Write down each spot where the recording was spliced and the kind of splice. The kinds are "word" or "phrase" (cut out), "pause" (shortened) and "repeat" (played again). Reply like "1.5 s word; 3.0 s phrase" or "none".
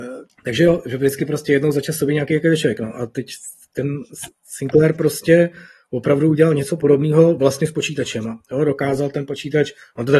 none